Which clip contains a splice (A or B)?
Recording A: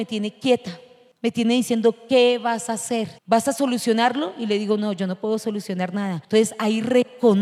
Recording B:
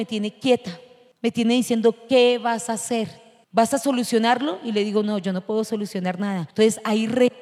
A